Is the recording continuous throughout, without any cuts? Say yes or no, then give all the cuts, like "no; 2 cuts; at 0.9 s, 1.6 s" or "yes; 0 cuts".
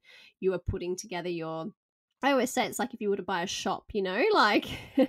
yes; 0 cuts